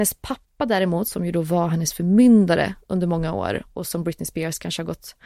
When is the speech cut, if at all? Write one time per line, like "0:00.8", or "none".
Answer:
none